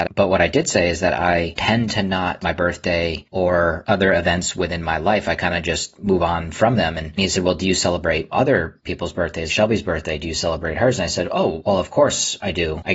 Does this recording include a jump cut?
yes; 2 cuts; at 2.4 s, 9.5 s

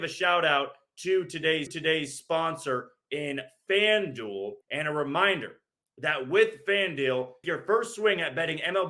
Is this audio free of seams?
no; 3 cuts; at 1.7 s, 4.6 s, 7.4 s

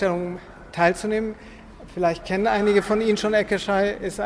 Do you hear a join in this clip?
no; 0 cuts

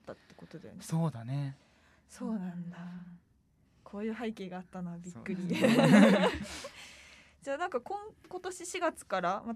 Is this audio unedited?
yes; 0 cuts

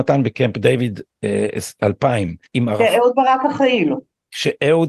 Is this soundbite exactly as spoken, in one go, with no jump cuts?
no; 1 cut; at 2.5 s

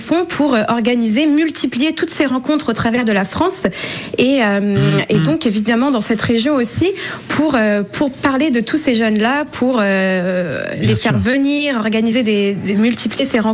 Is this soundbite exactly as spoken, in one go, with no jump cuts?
yes; 0 cuts

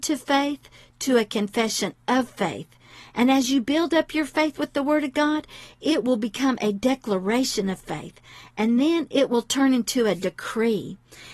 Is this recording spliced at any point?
no; 0 cuts

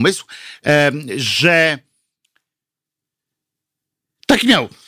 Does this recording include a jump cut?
no; 0 cuts

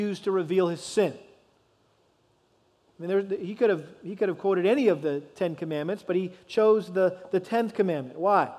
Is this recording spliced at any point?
no; 0 cuts

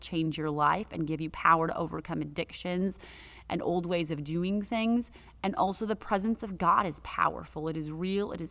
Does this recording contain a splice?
no; 0 cuts

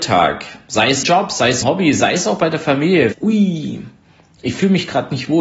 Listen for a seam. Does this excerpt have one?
yes; 3 cuts; at 1.0 s, 1.6 s, 3.1 s

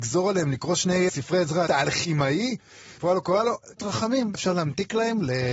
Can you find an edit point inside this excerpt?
yes; 5 cuts; at 1.1 s, 1.7 s, 3.0 s, 3.8 s, 4.3 s

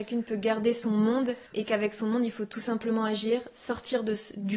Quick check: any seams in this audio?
yes; 1 cut; at 1.5 s

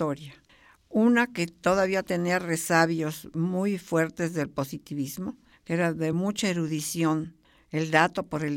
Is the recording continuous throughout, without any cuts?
yes; 0 cuts

